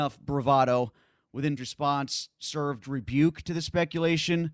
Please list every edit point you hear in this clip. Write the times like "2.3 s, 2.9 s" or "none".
1.6 s, 2.8 s